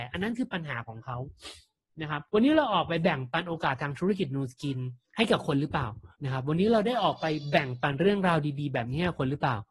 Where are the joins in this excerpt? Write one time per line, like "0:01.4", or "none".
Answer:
0:02.3
0:05.0
0:06.1